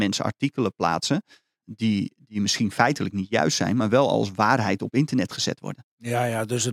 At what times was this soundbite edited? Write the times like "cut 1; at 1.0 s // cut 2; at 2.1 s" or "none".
cut 1; at 1.6 s

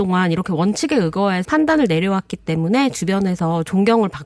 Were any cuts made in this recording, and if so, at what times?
cut 1; at 1.4 s

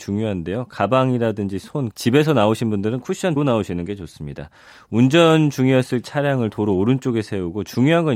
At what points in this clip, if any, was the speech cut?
cut 1; at 1.9 s // cut 2; at 3.4 s // cut 3; at 6.0 s

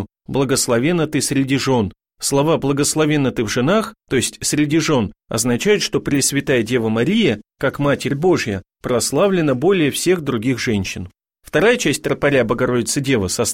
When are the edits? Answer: none

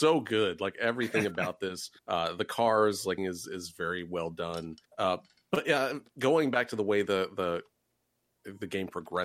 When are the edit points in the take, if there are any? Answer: cut 1; at 2.0 s // cut 2; at 3.2 s // cut 3; at 4.8 s // cut 4; at 6.1 s

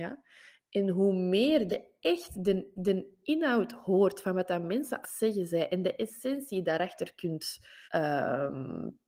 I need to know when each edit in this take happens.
cut 1; at 1.7 s // cut 2; at 2.8 s // cut 3; at 5.0 s // cut 4; at 7.9 s

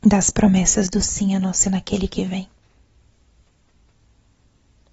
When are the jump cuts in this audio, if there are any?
cut 1; at 1.0 s // cut 2; at 1.6 s

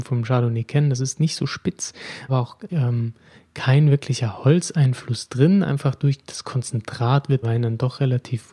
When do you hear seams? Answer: cut 1; at 2.3 s // cut 2; at 2.7 s // cut 3; at 7.4 s

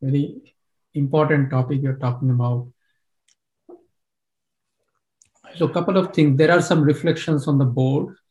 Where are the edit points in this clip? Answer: none

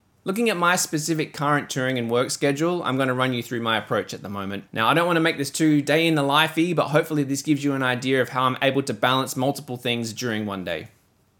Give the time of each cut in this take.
cut 1; at 4.7 s

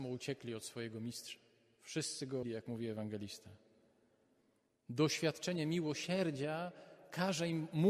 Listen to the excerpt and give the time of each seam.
cut 1; at 2.4 s

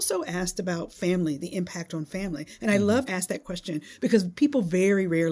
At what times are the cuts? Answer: cut 1; at 3.1 s

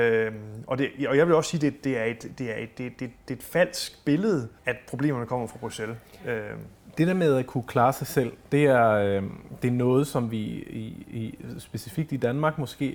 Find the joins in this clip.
cut 1; at 4.6 s

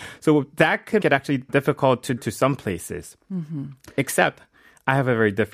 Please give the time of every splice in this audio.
cut 1; at 1.0 s // cut 2; at 1.5 s // cut 3; at 2.2 s

